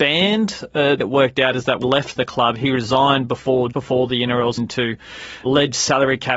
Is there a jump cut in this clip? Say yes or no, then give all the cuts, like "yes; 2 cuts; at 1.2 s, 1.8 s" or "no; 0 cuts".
yes; 5 cuts; at 1.0 s, 1.8 s, 3.7 s, 4.6 s, 5.5 s